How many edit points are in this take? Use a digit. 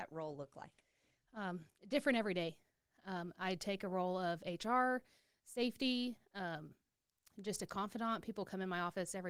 0